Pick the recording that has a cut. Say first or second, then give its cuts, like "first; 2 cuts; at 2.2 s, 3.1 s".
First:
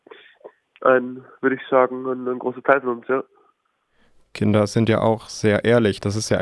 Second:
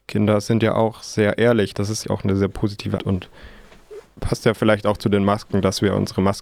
second; 2 cuts; at 2.0 s, 3.0 s